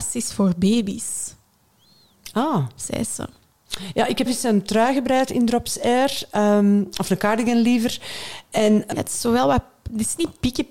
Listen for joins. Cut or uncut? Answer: cut